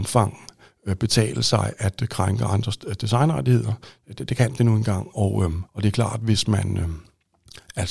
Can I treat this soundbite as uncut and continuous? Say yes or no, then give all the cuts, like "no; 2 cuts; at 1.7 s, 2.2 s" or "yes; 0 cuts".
no; 1 cut; at 5.7 s